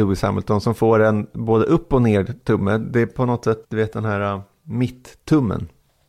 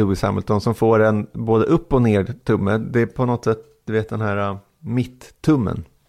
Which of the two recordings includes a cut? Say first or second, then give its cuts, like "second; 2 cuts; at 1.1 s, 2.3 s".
first; 1 cut; at 3.6 s